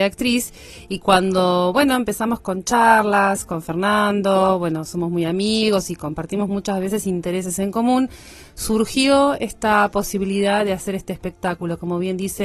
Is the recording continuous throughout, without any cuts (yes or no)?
yes